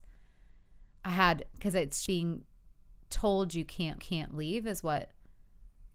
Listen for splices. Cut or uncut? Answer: cut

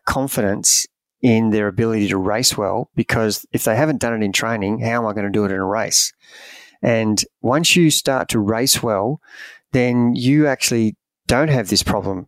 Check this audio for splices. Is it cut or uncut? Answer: uncut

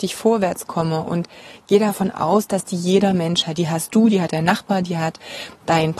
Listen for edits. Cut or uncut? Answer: uncut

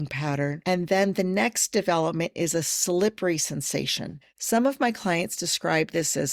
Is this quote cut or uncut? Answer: cut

